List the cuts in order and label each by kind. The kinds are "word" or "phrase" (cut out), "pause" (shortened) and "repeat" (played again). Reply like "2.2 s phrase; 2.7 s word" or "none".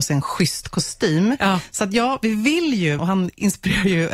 3.0 s word